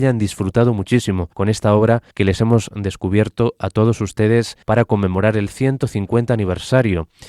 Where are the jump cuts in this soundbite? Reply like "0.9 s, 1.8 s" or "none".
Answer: 1.3 s, 2.1 s, 4.6 s